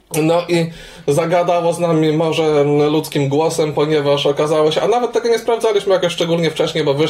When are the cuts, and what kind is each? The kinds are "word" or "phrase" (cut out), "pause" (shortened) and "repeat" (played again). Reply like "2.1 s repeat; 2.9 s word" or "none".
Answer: none